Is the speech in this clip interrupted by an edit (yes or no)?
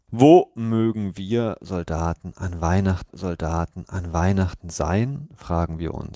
yes